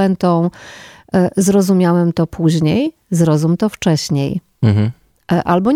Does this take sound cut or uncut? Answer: uncut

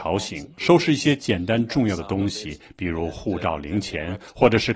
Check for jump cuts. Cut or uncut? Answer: uncut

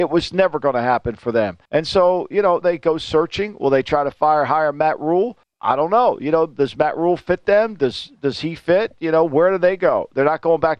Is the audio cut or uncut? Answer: cut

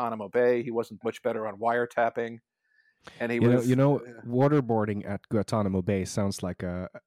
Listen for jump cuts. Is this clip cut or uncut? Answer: cut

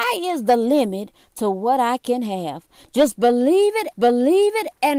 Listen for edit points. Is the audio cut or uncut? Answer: cut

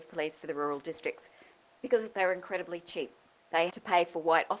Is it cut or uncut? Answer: cut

